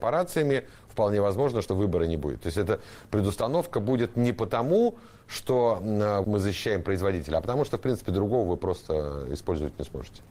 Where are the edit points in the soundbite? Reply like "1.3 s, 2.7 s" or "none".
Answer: 1.7 s, 6.2 s

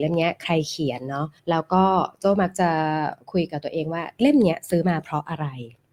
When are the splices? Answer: 1.4 s

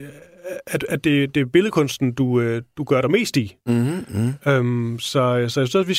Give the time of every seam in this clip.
none

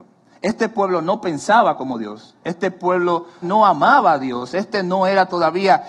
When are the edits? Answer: 3.4 s

